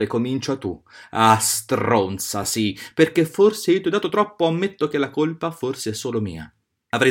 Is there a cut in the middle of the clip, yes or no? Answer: no